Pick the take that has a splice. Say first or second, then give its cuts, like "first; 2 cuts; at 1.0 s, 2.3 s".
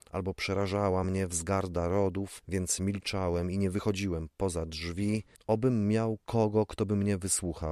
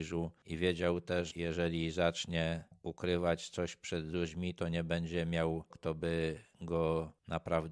second; 2 cuts; at 1.3 s, 5.7 s